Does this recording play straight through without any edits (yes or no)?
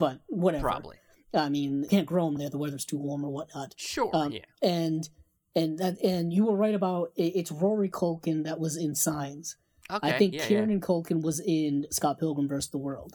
no